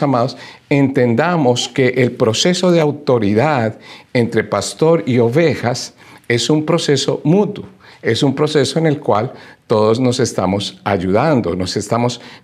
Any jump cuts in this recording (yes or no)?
no